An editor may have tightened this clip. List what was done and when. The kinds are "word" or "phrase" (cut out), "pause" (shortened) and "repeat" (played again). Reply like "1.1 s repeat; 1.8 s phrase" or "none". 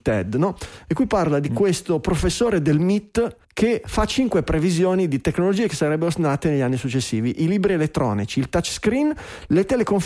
3.4 s pause